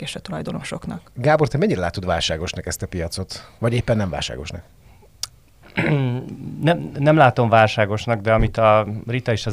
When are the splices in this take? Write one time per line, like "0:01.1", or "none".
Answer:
0:03.6

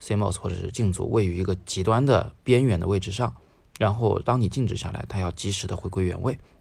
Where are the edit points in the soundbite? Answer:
none

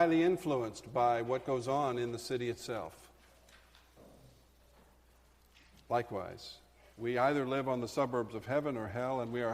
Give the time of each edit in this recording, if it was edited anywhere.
0:06.9

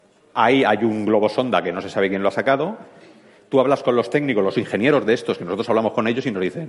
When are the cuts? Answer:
none

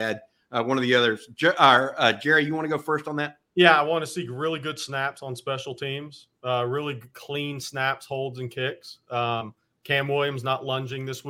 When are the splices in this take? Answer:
0:09.7

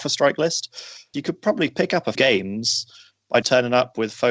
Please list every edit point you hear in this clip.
0:01.1
0:02.1
0:03.4

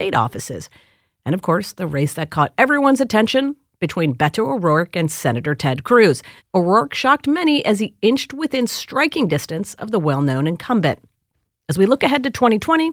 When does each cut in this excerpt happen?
0:06.4

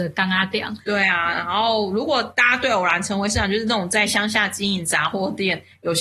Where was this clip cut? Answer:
none

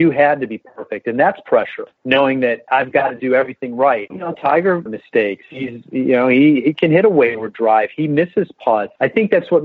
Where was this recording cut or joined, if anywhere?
0:04.1
0:04.9

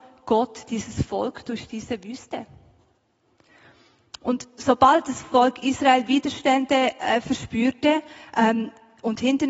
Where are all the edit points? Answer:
none

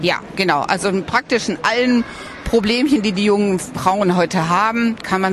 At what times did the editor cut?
none

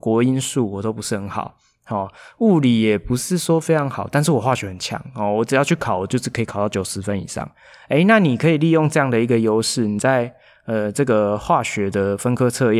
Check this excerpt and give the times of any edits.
none

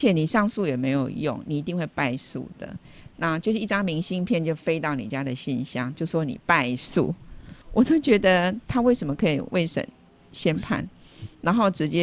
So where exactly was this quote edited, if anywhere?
0:07.6

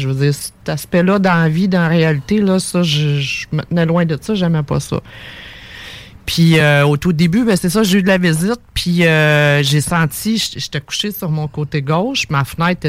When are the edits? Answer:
none

